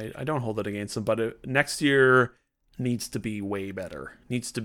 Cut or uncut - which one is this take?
uncut